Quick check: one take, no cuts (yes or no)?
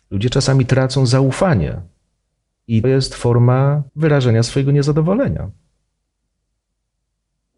no